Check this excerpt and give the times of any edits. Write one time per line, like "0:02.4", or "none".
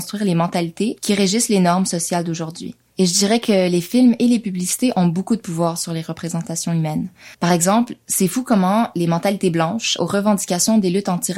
0:07.3
0:10.0